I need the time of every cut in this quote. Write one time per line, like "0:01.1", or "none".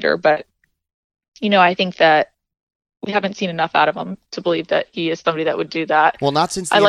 none